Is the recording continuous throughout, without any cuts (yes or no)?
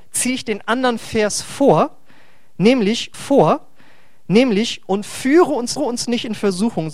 no